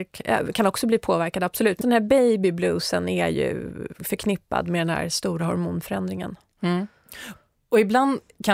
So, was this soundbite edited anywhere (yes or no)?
yes